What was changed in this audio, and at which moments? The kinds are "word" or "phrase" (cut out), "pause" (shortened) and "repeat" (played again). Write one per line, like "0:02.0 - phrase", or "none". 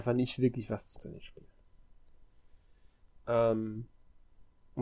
0:01.0 - word